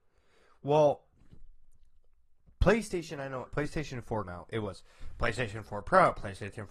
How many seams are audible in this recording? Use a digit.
2